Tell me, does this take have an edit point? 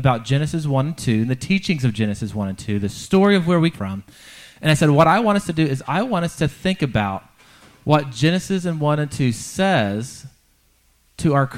yes; 1 cut; at 3.7 s

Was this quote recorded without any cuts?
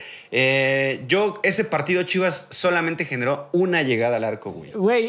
yes; 0 cuts

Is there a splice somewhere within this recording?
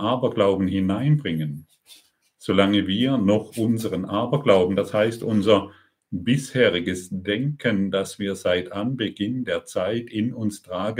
no; 0 cuts

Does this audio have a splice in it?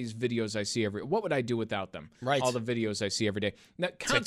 no; 0 cuts

